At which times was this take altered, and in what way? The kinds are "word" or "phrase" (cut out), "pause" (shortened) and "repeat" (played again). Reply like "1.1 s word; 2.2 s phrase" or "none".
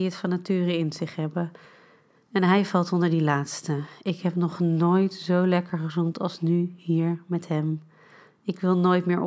none